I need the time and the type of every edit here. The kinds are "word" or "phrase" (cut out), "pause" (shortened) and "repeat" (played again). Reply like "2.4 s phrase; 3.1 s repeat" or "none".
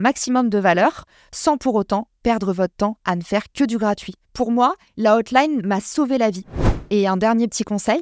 none